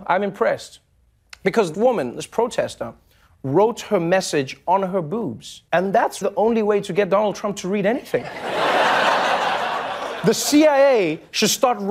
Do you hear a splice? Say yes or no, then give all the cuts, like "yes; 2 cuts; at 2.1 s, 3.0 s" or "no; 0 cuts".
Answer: yes; 3 cuts; at 1.7 s, 5.7 s, 6.2 s